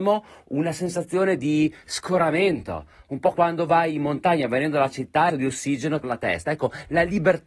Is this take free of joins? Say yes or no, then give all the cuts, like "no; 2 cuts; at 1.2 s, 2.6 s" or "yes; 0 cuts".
no; 3 cuts; at 3.3 s, 5.3 s, 6.0 s